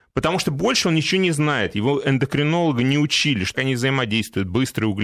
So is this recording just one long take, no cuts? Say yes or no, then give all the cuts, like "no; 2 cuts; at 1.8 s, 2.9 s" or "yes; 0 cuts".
no; 1 cut; at 3.5 s